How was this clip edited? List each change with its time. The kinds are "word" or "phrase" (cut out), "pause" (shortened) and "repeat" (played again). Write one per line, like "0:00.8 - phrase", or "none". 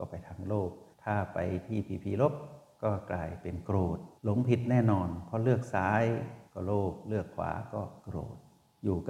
0:00.9 - pause
0:04.2 - pause